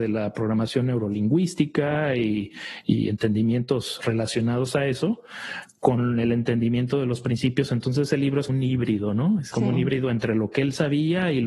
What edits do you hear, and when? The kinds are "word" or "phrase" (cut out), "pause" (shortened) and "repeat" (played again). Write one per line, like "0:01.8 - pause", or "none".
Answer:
0:08.5 - word
0:09.5 - phrase